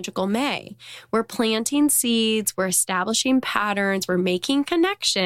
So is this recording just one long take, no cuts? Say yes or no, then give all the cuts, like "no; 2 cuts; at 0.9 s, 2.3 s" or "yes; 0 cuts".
yes; 0 cuts